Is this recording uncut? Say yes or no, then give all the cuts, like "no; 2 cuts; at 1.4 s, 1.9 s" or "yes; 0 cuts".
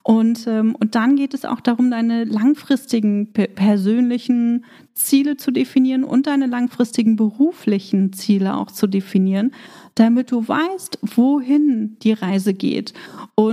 yes; 0 cuts